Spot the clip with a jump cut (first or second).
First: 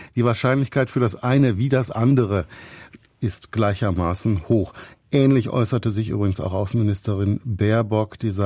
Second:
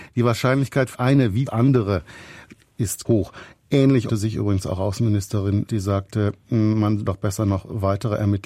second